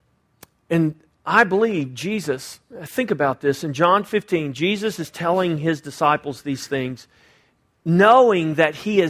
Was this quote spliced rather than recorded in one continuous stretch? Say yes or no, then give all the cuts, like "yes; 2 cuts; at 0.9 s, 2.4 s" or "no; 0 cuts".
no; 0 cuts